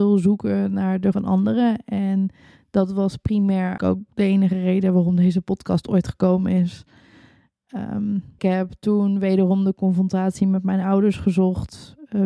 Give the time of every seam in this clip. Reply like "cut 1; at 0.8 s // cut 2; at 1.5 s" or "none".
cut 1; at 1.1 s // cut 2; at 3.8 s // cut 3; at 8.4 s

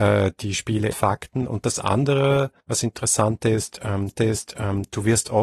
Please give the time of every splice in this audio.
cut 1; at 0.9 s // cut 2; at 2.6 s // cut 3; at 4.1 s

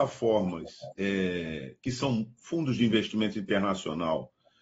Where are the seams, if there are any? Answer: cut 1; at 0.9 s

